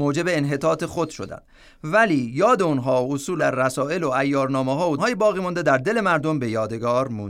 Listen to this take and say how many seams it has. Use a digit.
2